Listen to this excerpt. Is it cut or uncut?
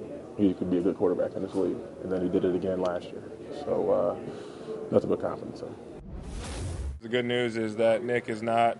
uncut